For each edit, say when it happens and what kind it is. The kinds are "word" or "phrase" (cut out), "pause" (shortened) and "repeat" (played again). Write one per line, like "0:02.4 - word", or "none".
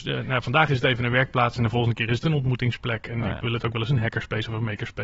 none

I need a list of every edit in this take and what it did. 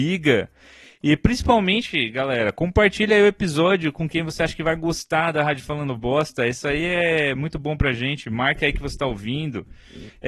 none

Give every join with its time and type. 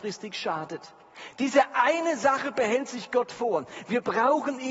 none

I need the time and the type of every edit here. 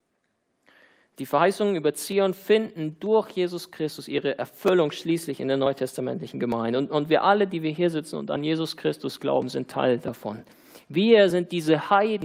none

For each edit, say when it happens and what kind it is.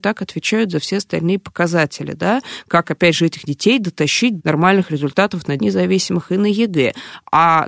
0:03.4 - word
0:04.4 - word
0:05.6 - word

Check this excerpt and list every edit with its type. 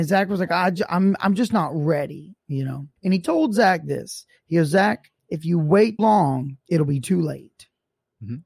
0:02.4 - pause
0:03.0 - pause
0:05.2 - pause
0:06.0 - word
0:06.6 - pause

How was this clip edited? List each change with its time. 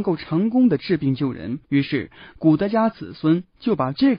0:01.6 - pause

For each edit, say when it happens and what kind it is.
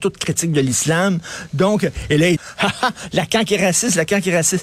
0:02.4 - word

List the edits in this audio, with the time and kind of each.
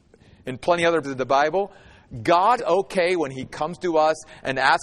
0:01.0 - word
0:02.6 - word

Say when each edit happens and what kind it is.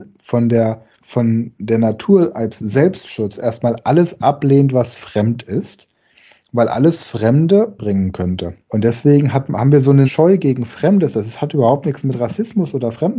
0:00.9 - pause
0:07.8 - phrase
0:08.6 - pause
0:10.0 - word

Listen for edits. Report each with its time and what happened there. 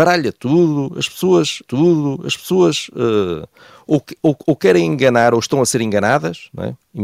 0:01.6 - repeat

